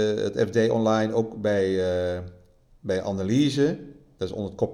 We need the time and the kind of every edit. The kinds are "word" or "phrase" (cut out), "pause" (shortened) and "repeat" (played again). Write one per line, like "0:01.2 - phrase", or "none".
none